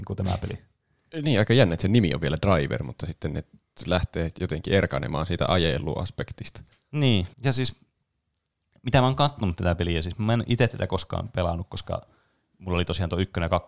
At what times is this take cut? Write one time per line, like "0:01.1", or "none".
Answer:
0:07.3